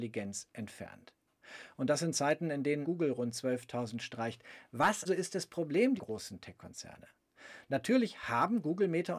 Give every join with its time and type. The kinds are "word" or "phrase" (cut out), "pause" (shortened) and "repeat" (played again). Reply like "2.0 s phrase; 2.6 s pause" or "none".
2.8 s word; 4.0 s word; 5.1 s word; 6.0 s word